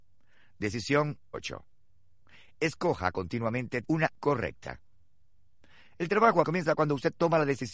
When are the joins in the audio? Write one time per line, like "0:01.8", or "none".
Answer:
0:01.3
0:03.8
0:04.2
0:06.4